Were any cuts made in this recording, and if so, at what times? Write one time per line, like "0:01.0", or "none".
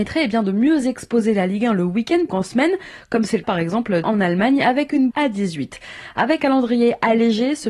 0:02.3
0:03.4
0:04.0
0:05.1
0:06.4

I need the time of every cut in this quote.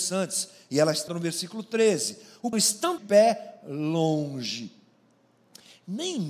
0:01.1
0:02.5
0:03.0

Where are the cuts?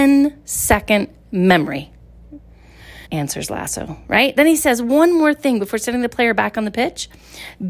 0:03.1

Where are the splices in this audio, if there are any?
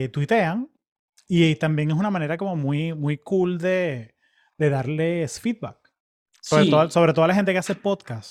0:06.1

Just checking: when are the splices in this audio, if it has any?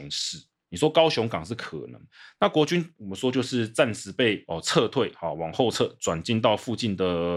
none

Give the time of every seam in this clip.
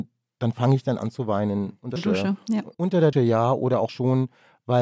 0:01.0
0:02.0
0:02.7
0:03.1
0:03.9

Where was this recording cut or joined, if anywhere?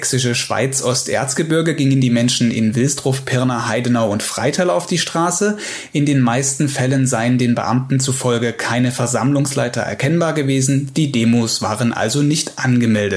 none

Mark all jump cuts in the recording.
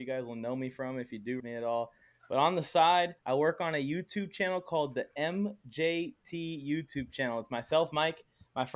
0:01.4
0:03.2

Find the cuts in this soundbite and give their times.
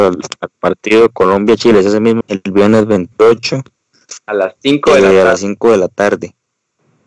0:02.2

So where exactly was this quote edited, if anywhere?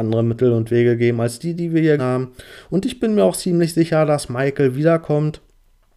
0:02.0

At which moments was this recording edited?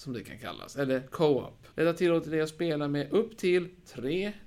0:01.7

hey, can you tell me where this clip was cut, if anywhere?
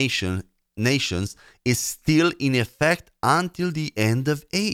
none

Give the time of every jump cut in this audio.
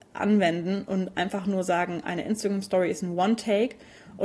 none

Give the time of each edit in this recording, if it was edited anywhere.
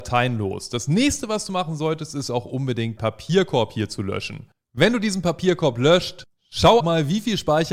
0:03.0
0:06.8

